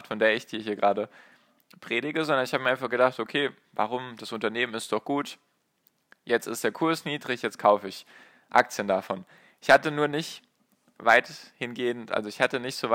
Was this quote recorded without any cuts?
yes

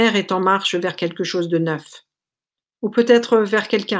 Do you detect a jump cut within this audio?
no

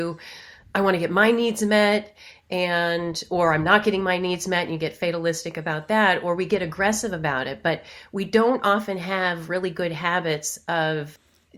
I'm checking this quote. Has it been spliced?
no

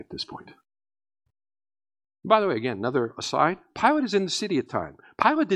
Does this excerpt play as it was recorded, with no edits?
no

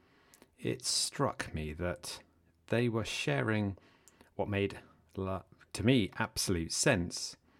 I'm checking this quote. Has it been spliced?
no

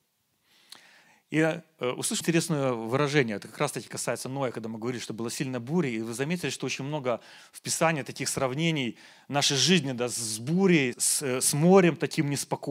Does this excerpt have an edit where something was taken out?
yes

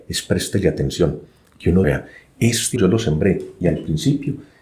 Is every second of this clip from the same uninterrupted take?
no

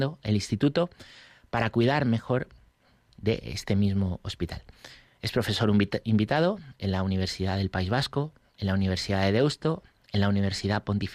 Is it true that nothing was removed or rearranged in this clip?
yes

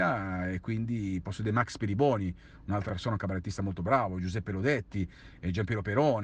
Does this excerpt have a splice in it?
yes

